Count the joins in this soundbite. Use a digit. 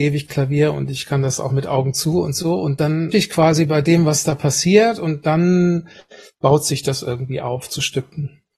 1